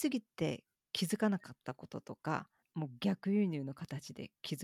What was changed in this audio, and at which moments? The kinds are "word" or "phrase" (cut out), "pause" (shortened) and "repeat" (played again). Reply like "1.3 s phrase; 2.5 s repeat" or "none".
none